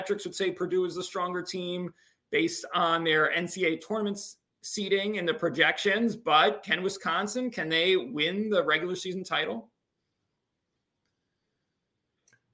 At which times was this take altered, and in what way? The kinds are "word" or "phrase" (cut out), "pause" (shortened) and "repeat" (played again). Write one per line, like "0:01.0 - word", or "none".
none